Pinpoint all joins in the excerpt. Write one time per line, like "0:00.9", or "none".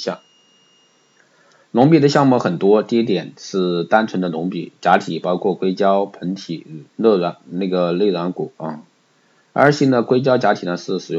0:06.9